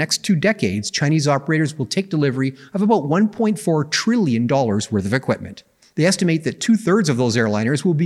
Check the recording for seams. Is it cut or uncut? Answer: cut